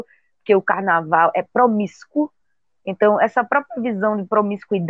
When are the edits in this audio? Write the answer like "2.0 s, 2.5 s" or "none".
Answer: none